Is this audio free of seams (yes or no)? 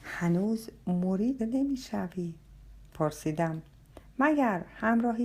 no